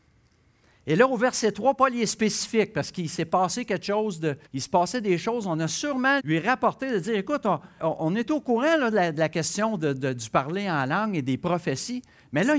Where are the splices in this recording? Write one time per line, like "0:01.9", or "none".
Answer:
0:04.5
0:06.2
0:07.8